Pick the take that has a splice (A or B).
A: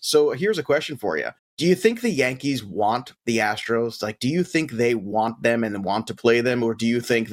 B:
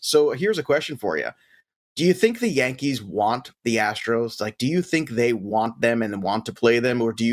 A